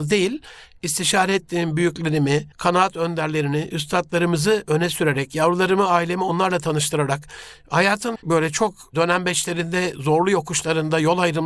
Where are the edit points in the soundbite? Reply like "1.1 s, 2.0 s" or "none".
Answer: 2.5 s, 8.2 s